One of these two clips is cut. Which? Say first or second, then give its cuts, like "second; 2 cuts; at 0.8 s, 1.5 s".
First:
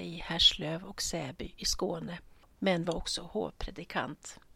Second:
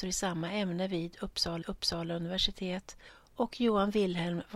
second; 1 cut; at 1.6 s